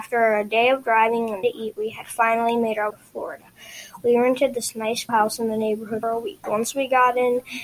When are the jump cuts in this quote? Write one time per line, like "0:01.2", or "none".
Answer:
0:01.4
0:02.9
0:05.1
0:06.0